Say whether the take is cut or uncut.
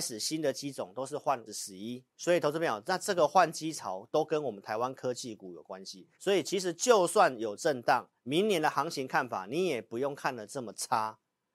cut